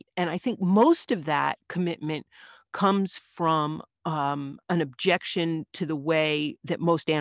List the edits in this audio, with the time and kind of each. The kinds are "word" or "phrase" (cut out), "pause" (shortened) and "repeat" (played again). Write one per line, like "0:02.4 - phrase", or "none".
none